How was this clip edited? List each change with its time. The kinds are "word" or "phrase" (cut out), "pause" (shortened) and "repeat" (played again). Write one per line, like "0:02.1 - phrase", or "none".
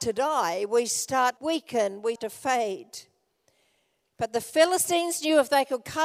0:01.4 - word
0:02.2 - word